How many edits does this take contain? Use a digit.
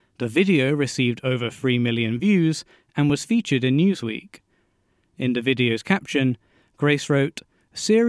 0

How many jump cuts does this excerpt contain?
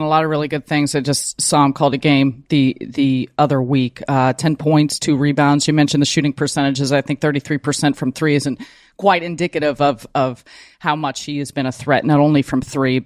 0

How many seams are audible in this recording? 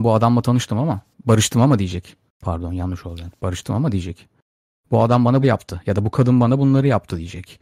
2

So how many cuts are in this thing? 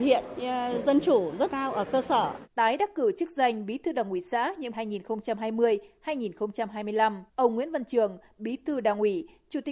4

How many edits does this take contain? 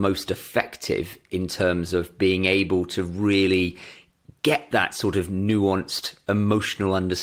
0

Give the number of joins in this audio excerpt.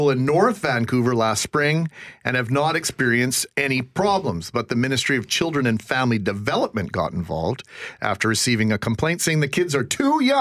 1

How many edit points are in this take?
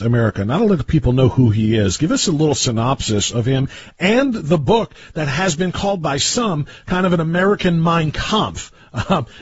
0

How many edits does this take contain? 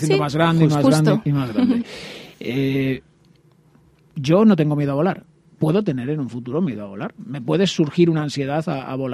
0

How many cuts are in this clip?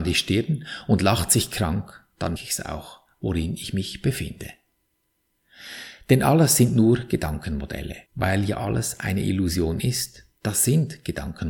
3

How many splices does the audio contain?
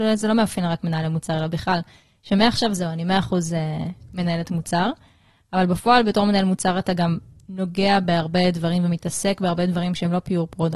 0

